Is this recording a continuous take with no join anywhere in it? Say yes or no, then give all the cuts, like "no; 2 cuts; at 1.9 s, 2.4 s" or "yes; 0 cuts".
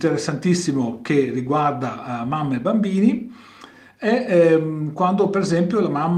yes; 0 cuts